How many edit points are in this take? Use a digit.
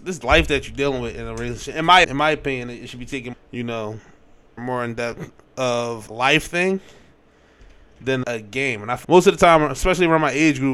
6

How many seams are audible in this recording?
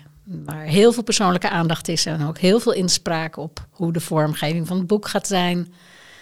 0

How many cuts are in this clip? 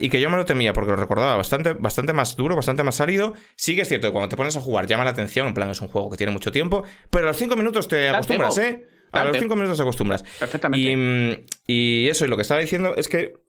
0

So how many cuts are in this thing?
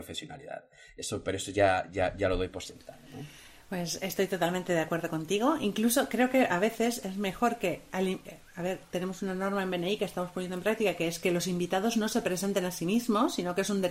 0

